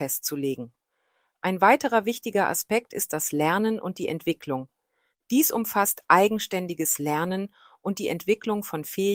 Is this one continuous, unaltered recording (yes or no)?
yes